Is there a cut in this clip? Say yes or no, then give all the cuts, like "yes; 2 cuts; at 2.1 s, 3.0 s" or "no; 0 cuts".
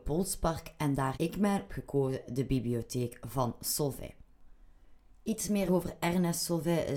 yes; 4 cuts; at 1.1 s, 1.7 s, 2.3 s, 5.7 s